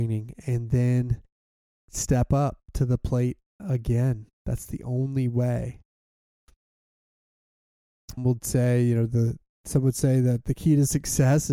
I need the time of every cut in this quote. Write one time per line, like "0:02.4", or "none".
0:01.6
0:04.3
0:08.2